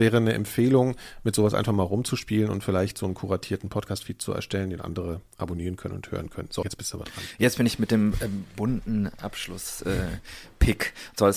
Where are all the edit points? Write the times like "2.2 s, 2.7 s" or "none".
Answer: 6.6 s